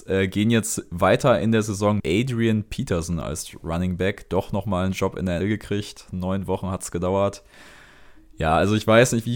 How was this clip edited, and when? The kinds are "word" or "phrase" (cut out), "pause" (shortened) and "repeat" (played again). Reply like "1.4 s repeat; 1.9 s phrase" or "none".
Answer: 2.0 s word; 5.4 s word